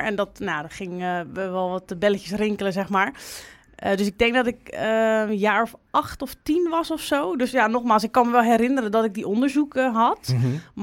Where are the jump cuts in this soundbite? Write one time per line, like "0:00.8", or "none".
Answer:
none